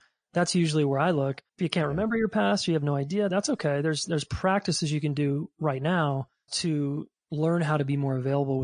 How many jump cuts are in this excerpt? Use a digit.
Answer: 3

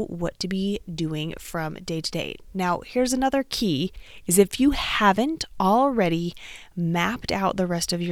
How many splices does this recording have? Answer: 0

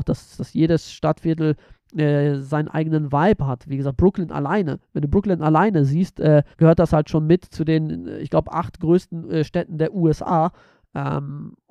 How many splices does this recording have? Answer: 1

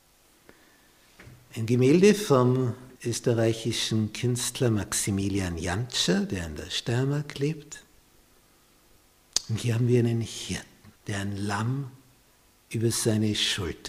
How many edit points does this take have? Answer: 2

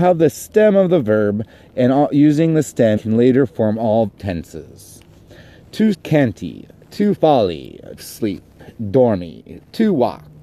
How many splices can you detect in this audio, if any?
5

